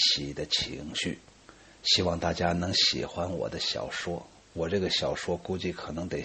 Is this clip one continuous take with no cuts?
no; 1 cut; at 1.4 s

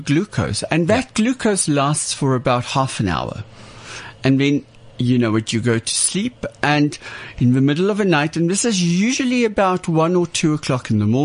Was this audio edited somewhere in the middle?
no; 0 cuts

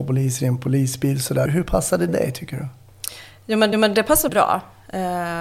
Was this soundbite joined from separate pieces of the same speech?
yes; 4 cuts; at 1.5 s, 2.1 s, 3.7 s, 4.3 s

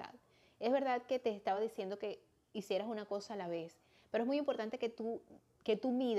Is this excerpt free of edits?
yes; 0 cuts

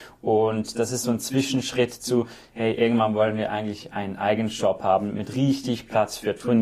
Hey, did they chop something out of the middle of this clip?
no; 0 cuts

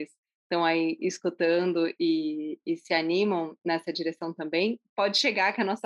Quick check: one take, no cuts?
yes; 0 cuts

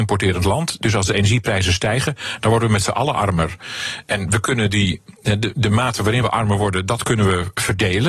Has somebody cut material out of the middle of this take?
no; 0 cuts

